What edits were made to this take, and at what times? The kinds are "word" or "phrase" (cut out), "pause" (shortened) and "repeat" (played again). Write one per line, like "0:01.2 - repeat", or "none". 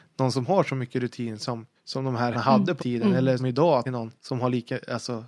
0:01.7 - pause
0:02.3 - word
0:02.8 - word
0:03.4 - word
0:03.8 - phrase
0:04.2 - pause